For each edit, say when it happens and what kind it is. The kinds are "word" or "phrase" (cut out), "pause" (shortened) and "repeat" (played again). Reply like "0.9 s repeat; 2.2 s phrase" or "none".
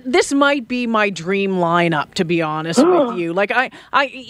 none